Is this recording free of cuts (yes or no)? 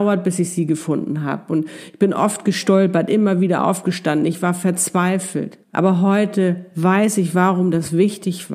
no